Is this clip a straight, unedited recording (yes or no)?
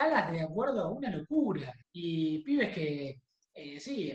no